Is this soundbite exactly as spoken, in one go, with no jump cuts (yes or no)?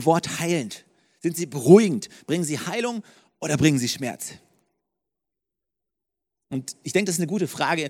yes